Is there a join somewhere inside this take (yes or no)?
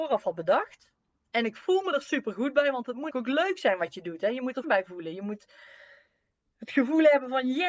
yes